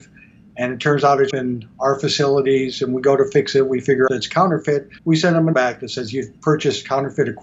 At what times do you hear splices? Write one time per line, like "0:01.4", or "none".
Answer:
0:01.3
0:04.1
0:05.0
0:05.5
0:06.4

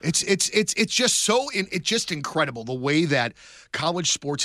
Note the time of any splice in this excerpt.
none

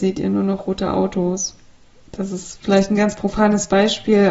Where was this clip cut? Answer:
none

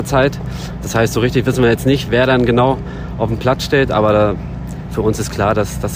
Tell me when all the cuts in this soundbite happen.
none

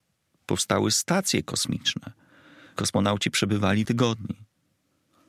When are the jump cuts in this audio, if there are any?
0:02.8
0:03.8

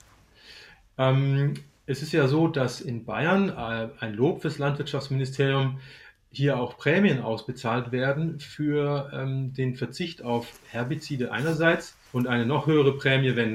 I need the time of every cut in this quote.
0:12.1

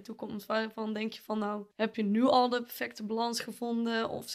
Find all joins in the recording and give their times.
0:01.7

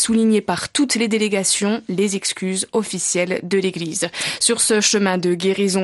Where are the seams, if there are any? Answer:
none

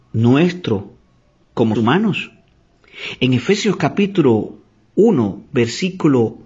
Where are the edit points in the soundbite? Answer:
0:01.8

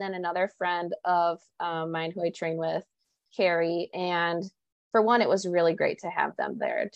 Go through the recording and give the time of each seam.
none

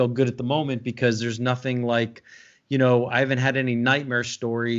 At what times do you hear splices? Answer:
none

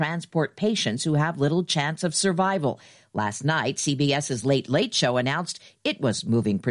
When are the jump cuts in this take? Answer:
none

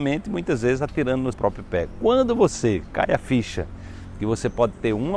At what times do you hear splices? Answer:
0:01.3

